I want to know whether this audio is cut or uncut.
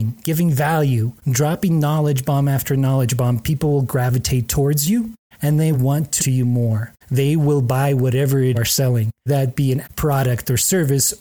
cut